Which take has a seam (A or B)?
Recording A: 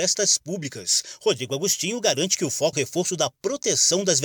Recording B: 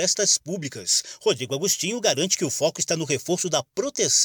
A